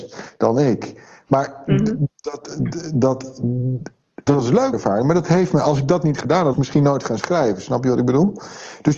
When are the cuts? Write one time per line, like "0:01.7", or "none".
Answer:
0:04.3
0:04.7
0:06.5